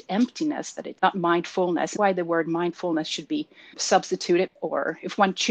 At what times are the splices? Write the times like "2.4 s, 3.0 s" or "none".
1.0 s, 2.0 s, 3.7 s, 4.5 s

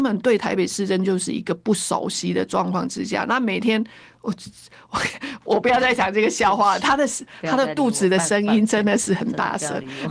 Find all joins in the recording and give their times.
none

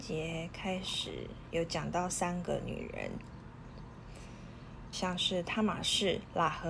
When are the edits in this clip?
4.9 s

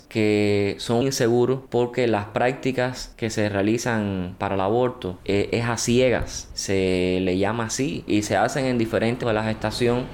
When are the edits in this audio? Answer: 1.0 s, 8.1 s, 9.2 s

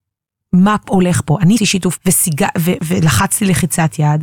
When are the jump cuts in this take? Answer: 1.6 s, 2.0 s, 2.8 s

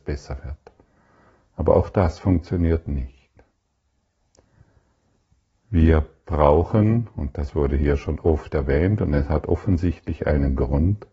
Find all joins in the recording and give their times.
none

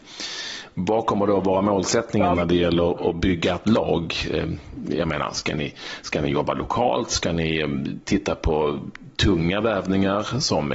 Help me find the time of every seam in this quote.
none

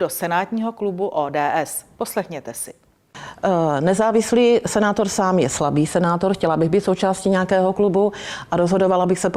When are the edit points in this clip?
none

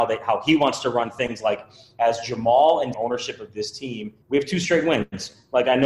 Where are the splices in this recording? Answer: 2.9 s, 4.2 s

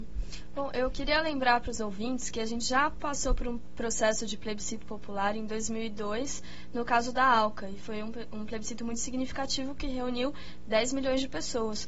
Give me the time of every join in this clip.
none

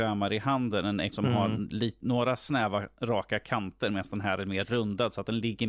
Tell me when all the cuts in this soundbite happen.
1.1 s

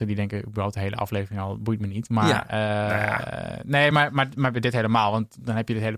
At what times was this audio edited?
none

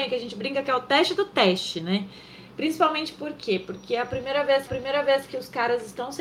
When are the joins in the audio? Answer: 4.7 s

